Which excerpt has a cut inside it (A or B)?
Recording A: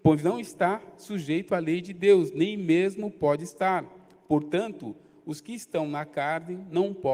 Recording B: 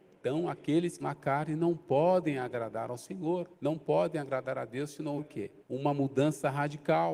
B